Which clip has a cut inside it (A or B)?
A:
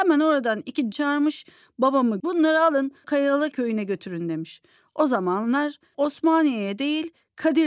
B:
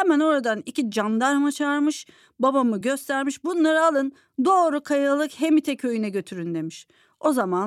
A